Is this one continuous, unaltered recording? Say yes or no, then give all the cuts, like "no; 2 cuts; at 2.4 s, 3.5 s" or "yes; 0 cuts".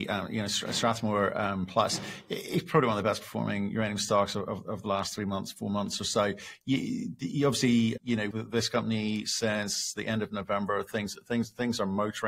no; 2 cuts; at 8.0 s, 8.3 s